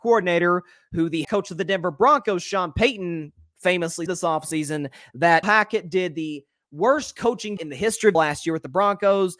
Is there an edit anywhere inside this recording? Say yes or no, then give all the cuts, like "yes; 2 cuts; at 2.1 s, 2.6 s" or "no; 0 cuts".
yes; 5 cuts; at 1.2 s, 4.1 s, 5.4 s, 7.6 s, 8.1 s